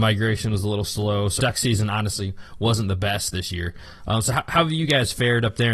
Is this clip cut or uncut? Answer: cut